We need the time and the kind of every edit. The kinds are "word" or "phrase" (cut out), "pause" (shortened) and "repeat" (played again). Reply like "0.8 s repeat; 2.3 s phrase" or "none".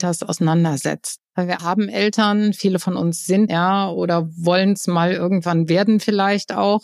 1.2 s pause; 1.6 s word; 3.5 s word

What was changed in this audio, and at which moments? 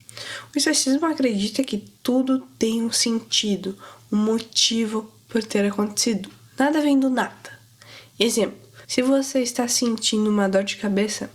8.8 s pause

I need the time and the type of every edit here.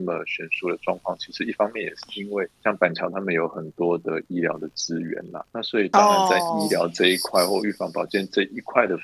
2.6 s pause; 5.5 s pause

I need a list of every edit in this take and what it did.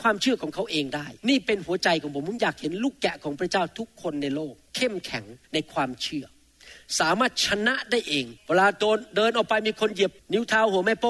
1.2 s pause; 4.7 s pause; 5.4 s pause; 8.4 s pause

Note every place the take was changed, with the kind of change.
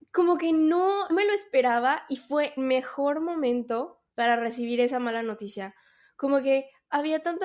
1.1 s word; 2.6 s word; 4.1 s pause

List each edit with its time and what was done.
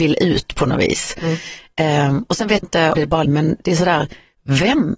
2.6 s word; 2.9 s word; 3.2 s phrase

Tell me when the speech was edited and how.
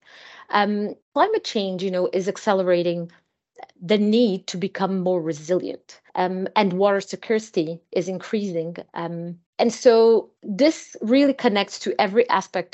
1.0 s pause; 6.1 s pause; 9.5 s pause; 10.4 s pause

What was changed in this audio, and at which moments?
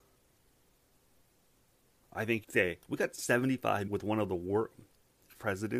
2.4 s word; 2.8 s word; 3.9 s word

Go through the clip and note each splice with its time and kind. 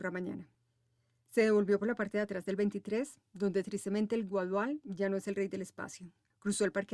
none

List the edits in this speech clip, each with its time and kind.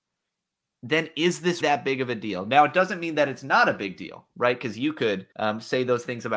1.6 s word; 5.3 s pause

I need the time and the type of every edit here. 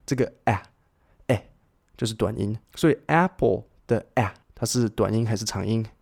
2.6 s pause; 4.4 s pause

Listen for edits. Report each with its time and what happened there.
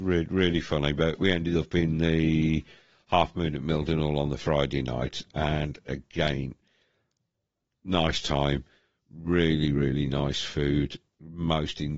none

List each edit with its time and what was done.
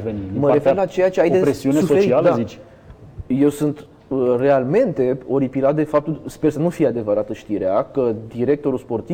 none

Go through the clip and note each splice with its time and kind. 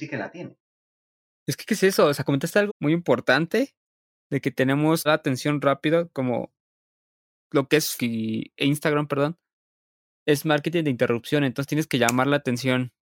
2.7 s word; 5.1 s phrase; 8.0 s word; 8.6 s word

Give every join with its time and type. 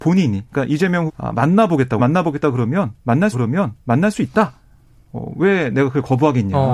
1.1 s word; 2.0 s word; 3.3 s repeat

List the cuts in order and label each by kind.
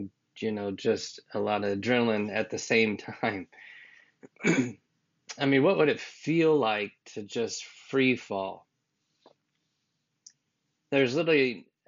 none

